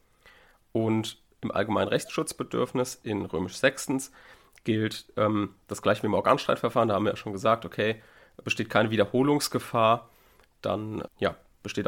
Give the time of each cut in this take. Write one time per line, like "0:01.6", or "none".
none